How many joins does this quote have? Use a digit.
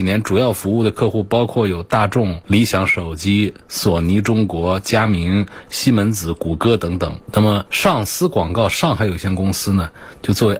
0